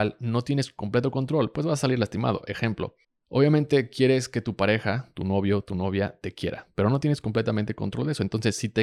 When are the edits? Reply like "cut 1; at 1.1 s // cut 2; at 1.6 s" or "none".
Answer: cut 1; at 3.0 s